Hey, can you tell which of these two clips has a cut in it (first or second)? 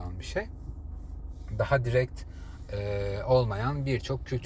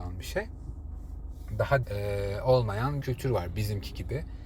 second